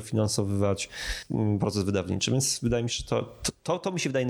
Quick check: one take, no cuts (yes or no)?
yes